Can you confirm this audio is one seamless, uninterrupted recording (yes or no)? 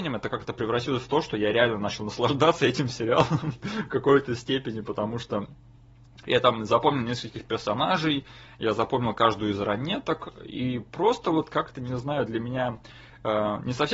yes